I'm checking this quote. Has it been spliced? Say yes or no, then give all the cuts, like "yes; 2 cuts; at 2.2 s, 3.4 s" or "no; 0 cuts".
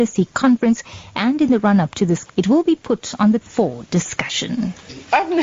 yes; 2 cuts; at 2.3 s, 3.4 s